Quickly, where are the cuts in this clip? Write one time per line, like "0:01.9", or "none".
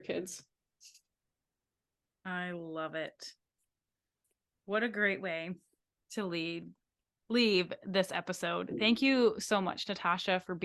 none